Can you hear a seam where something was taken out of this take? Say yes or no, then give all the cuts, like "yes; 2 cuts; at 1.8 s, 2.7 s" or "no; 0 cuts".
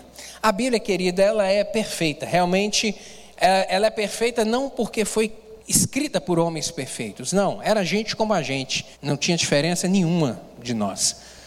yes; 2 cuts; at 5.6 s, 8.9 s